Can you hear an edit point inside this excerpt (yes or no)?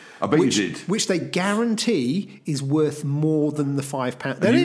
no